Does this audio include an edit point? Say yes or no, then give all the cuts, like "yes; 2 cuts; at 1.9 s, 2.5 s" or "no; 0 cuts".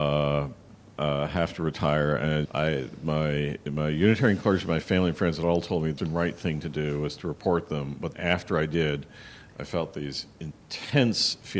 yes; 3 cuts; at 2.5 s, 6.0 s, 8.1 s